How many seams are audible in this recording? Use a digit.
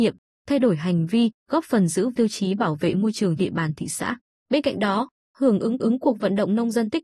5